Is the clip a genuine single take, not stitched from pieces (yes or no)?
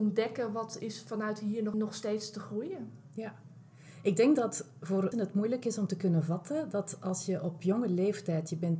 no